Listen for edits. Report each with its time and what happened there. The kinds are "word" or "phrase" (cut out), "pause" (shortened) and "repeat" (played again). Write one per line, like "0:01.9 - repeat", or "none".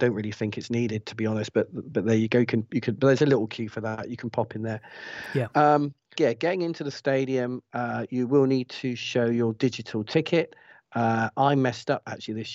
0:06.1 - phrase